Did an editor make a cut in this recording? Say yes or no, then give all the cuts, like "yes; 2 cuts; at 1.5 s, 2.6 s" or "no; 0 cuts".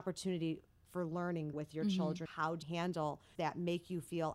yes; 4 cuts; at 1.5 s, 2.3 s, 2.6 s, 3.4 s